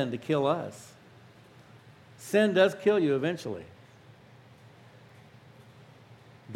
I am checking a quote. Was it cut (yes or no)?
no